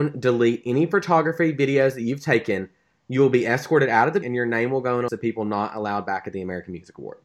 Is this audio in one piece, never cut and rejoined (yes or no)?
no